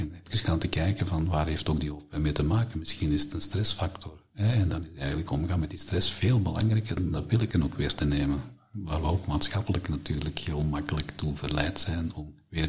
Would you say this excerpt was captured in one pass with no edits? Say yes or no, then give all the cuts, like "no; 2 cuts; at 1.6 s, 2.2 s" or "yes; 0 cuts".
yes; 0 cuts